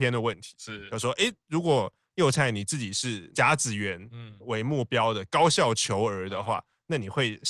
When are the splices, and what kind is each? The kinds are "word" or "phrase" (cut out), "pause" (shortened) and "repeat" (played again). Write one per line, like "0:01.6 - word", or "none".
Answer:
none

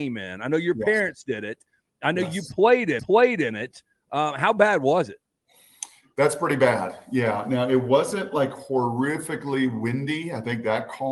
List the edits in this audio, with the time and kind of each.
0:03.0 - repeat

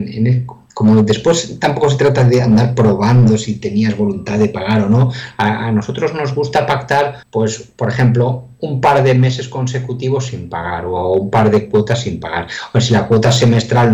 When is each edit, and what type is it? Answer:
0:07.2 - pause

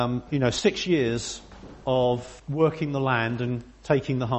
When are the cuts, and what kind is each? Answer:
0:02.4 - word

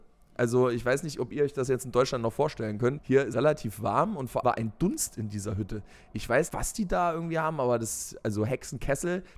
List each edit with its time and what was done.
0:03.0 - word
0:03.3 - word
0:04.4 - word
0:06.5 - word

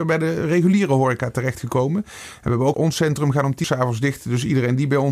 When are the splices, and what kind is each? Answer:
0:02.7 - word
0:03.6 - word

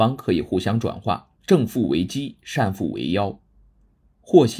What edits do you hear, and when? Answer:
0:01.4 - pause

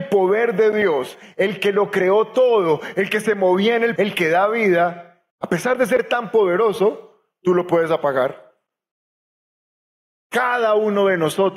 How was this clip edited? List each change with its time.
0:04.0 - word
0:05.3 - pause

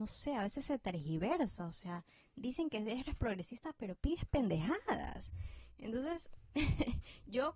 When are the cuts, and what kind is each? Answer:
none

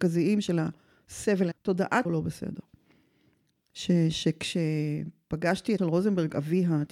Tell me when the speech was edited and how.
0:01.5 - word
0:02.1 - word
0:05.8 - word

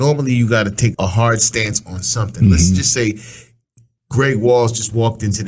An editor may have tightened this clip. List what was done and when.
0:00.9 - word

